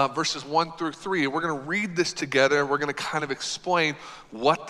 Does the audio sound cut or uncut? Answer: uncut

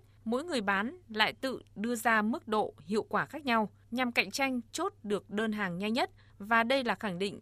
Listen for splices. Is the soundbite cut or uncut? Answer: uncut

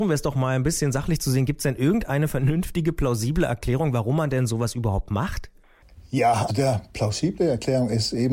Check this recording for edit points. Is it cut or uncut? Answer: cut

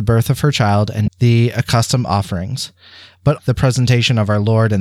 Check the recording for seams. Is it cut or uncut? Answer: cut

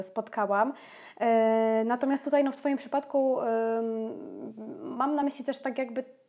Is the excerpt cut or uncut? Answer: uncut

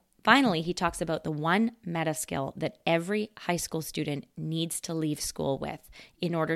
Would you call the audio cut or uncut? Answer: uncut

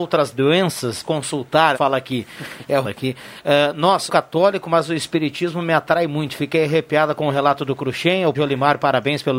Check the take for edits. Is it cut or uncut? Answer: cut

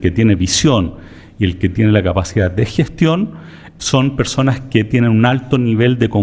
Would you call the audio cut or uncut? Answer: uncut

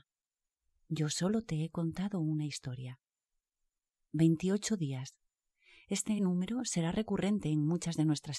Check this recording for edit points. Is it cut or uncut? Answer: uncut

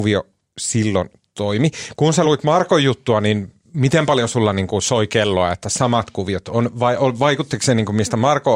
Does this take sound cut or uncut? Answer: uncut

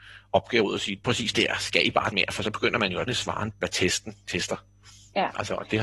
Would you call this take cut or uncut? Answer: cut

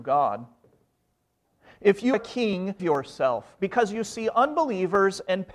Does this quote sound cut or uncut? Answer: cut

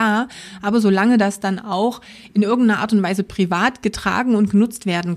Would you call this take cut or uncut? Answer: uncut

